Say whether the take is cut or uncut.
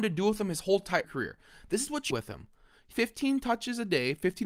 cut